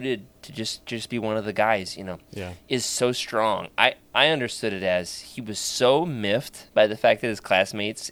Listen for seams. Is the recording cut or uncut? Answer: cut